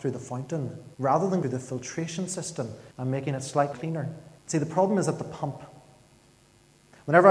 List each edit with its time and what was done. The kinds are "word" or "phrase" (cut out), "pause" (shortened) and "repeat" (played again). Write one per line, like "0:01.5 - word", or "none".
0:00.9 - pause
0:01.4 - phrase
0:02.9 - pause
0:03.7 - word
0:04.4 - pause